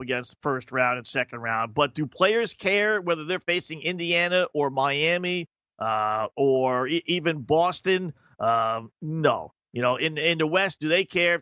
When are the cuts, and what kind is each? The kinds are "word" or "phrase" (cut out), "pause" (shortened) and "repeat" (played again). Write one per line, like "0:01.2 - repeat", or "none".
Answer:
none